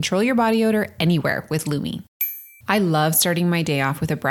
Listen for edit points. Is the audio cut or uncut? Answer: cut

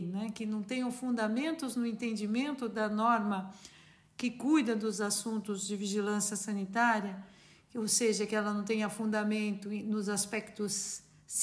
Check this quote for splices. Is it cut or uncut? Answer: uncut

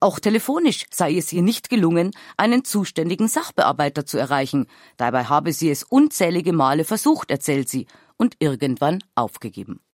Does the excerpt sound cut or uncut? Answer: uncut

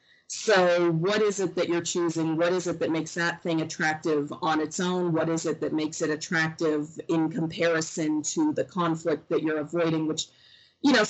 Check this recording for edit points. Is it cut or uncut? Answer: uncut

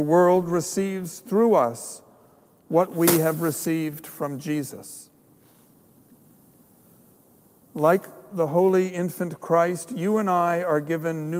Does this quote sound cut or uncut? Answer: uncut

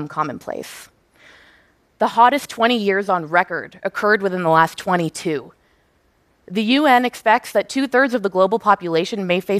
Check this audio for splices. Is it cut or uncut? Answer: uncut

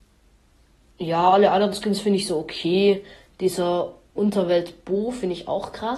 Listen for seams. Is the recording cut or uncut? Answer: uncut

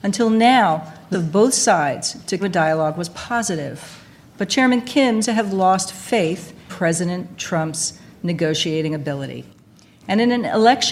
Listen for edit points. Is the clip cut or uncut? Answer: cut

